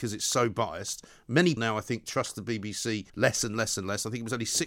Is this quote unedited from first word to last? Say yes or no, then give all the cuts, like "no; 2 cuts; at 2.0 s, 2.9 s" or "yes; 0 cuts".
no; 2 cuts; at 1.6 s, 3.1 s